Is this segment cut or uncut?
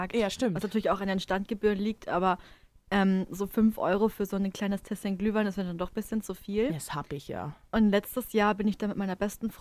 uncut